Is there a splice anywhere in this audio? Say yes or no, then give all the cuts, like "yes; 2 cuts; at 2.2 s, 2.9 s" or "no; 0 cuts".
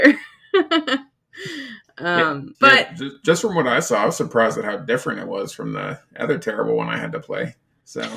yes; 1 cut; at 2.5 s